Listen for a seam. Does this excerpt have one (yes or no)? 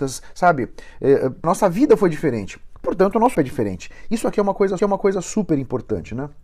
yes